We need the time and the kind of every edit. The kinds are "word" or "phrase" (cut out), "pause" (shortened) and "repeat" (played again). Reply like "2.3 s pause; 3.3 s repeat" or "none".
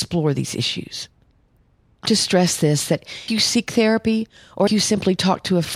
2.1 s word; 3.3 s word; 4.7 s word